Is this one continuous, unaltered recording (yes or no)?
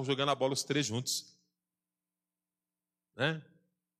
yes